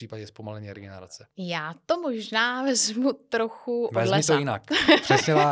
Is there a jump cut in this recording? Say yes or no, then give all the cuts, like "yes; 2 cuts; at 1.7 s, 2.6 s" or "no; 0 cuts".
yes; 1 cut; at 1.3 s